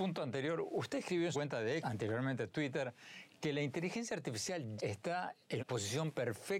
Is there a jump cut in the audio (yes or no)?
yes